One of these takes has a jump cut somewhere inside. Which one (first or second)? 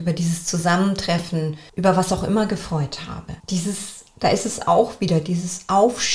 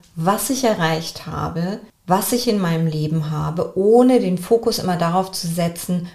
first